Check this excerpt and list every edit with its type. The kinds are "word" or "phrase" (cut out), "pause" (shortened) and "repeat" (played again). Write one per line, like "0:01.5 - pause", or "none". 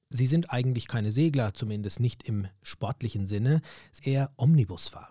0:04.0 - word

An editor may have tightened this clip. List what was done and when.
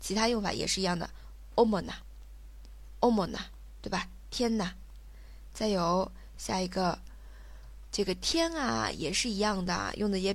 0:07.9 - word

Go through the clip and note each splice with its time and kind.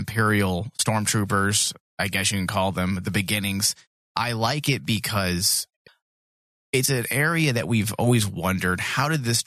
none

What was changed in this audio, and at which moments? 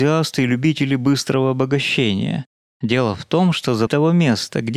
0:03.9 - word

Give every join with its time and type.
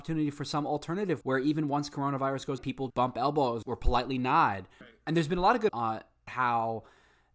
0:01.2 - word
0:02.6 - word
0:02.9 - word
0:03.6 - word
0:04.8 - word
0:05.7 - word
0:06.3 - word

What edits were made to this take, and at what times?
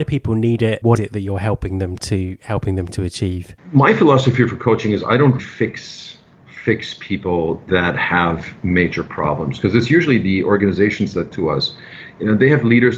0:01.0 - word
0:05.4 - word
0:07.7 - word
0:11.3 - word

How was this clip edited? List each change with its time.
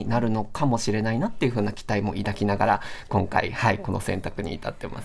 none

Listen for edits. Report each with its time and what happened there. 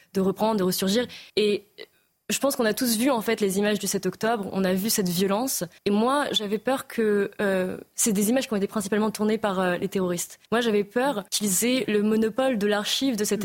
0:01.3 - pause
0:05.8 - pause
0:10.5 - pause
0:11.3 - pause

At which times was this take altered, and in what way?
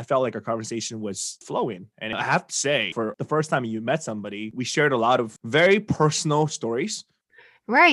none

